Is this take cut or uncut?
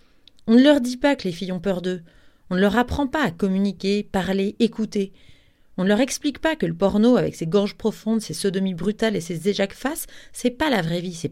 uncut